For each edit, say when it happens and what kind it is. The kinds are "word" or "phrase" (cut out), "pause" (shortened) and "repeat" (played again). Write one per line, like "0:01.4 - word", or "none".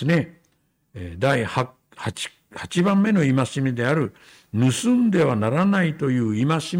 none